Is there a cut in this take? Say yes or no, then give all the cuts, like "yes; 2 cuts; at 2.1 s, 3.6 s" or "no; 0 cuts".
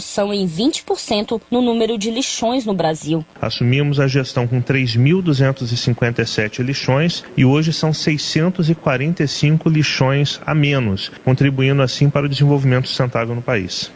no; 0 cuts